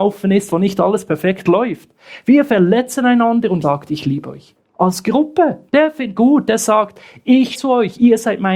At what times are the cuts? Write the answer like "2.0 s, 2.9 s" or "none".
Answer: 3.6 s, 5.7 s, 6.2 s, 7.5 s